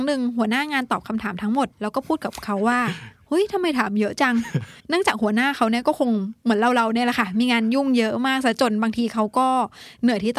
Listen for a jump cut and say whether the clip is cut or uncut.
cut